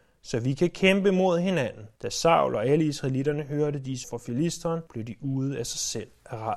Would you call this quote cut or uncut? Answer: cut